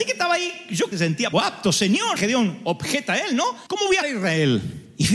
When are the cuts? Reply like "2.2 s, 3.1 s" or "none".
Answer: 0.9 s, 1.3 s, 2.2 s, 3.7 s, 4.0 s